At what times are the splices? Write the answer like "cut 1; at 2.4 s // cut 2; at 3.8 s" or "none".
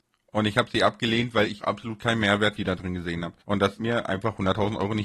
cut 1; at 1.6 s // cut 2; at 2.6 s // cut 3; at 3.4 s // cut 4; at 3.8 s